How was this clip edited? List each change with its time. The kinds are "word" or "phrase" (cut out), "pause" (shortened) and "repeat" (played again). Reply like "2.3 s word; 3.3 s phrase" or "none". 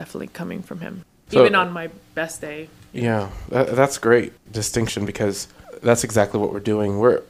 4.4 s pause